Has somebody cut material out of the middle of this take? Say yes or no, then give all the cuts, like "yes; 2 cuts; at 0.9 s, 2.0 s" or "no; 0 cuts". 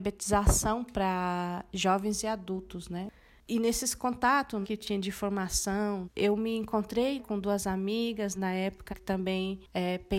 yes; 5 cuts; at 4.6 s, 6.0 s, 7.2 s, 8.3 s, 8.9 s